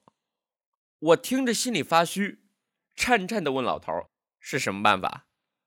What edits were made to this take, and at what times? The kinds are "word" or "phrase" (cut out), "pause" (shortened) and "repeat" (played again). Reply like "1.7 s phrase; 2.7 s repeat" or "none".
4.1 s pause